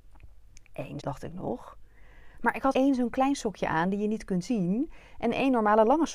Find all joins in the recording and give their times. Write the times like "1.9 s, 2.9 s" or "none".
1.0 s, 2.7 s